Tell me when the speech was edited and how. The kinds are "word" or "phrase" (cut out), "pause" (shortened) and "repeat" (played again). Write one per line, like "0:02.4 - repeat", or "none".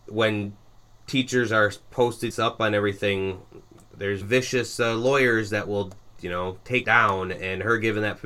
0:02.3 - word
0:04.2 - word
0:06.8 - word